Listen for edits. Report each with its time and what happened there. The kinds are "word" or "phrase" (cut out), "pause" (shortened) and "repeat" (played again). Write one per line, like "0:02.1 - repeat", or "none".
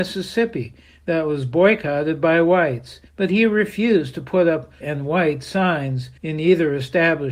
0:03.1 - pause
0:04.8 - word
0:06.2 - pause